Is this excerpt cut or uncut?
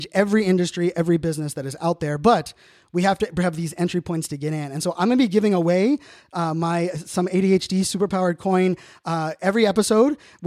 uncut